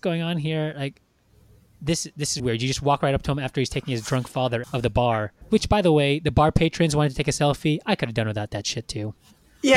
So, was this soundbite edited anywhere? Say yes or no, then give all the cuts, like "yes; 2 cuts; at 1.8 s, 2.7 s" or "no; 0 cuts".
yes; 3 cuts; at 2.4 s, 4.6 s, 5.4 s